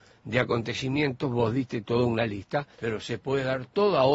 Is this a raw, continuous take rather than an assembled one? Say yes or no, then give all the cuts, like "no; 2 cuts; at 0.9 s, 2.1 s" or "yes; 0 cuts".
no; 1 cut; at 2.7 s